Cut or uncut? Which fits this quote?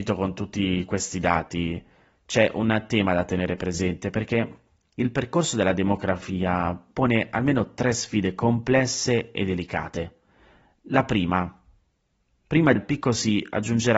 cut